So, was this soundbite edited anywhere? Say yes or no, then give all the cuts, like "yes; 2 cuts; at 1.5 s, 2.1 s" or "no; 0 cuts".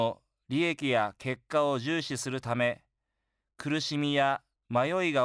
no; 0 cuts